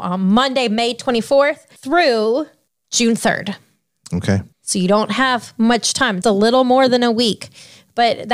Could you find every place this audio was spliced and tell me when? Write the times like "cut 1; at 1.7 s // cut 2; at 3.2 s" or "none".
cut 1; at 1.8 s // cut 2; at 4.5 s // cut 3; at 6.2 s

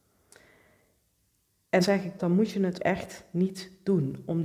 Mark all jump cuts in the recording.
cut 1; at 1.8 s // cut 2; at 2.2 s // cut 3; at 2.8 s

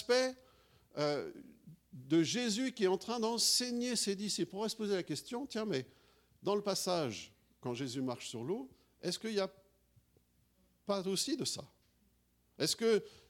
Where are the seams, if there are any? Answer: none

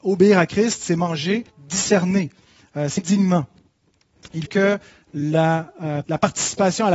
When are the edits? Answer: cut 1; at 1.5 s // cut 2; at 3.0 s // cut 3; at 4.5 s // cut 4; at 6.0 s

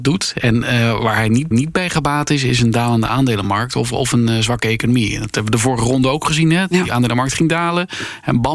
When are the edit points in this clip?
cut 1; at 1.5 s

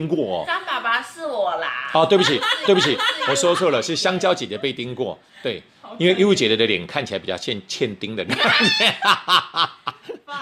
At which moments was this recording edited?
cut 1; at 2.6 s

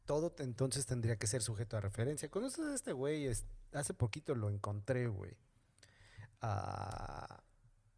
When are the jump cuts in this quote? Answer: none

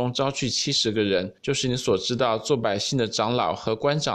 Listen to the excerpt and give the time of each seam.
cut 1; at 1.4 s

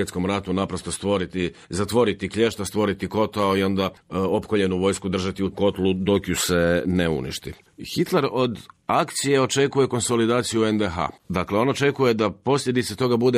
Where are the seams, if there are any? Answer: cut 1; at 5.5 s // cut 2; at 11.2 s

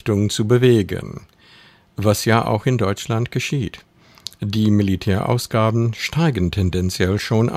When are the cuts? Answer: none

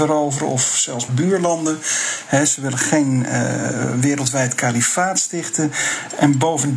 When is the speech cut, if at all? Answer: cut 1; at 1.1 s

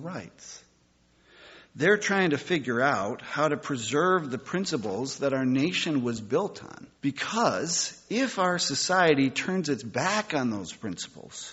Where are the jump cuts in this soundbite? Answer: cut 1; at 6.9 s

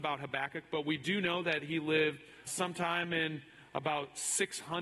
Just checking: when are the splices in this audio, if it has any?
cut 1; at 2.5 s

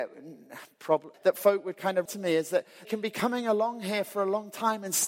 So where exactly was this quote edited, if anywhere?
cut 1; at 1.1 s // cut 2; at 2.1 s // cut 3; at 2.8 s

